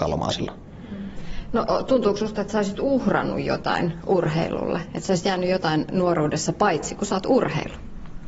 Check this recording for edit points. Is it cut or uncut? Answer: uncut